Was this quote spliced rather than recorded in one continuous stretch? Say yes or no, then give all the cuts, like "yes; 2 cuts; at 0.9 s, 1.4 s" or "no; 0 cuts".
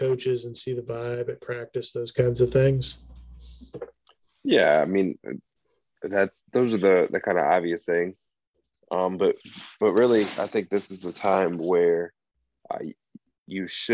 no; 0 cuts